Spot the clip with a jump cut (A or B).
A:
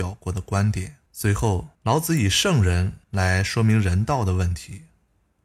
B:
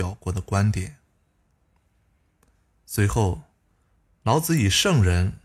A